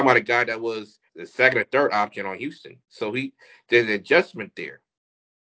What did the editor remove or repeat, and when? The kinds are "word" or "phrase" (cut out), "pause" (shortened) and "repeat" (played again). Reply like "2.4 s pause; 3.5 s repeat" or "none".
1.1 s pause; 2.8 s pause